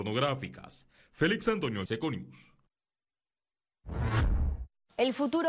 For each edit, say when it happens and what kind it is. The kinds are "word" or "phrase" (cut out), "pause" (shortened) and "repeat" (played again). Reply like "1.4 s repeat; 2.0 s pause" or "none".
1.9 s word